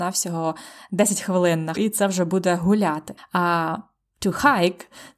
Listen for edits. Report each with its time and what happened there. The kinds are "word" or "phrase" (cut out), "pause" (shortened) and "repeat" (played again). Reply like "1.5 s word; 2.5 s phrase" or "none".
1.8 s word; 3.2 s pause